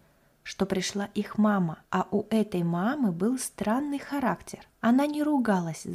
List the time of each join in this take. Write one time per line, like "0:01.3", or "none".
0:01.9
0:04.7